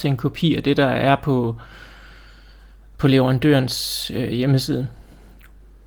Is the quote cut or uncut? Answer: uncut